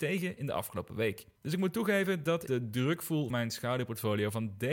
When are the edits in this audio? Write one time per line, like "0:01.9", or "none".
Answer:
0:01.4
0:02.5
0:03.3